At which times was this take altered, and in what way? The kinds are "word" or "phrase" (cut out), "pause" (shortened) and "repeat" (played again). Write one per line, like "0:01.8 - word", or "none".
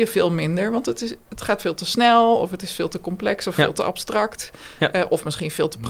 none